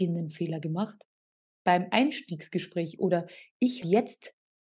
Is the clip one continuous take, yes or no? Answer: no